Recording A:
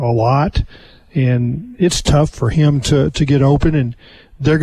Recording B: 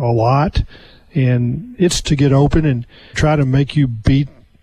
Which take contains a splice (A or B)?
B